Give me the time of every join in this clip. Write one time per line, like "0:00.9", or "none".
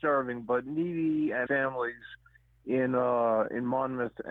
0:01.5